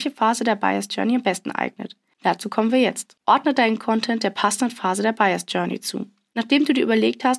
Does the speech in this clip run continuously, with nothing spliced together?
yes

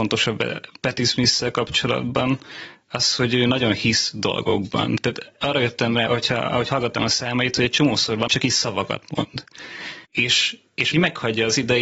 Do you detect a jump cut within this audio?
yes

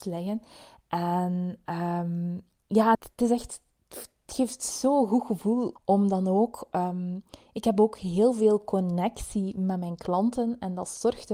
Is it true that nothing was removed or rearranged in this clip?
no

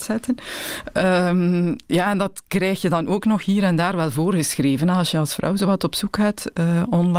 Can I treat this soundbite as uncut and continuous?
yes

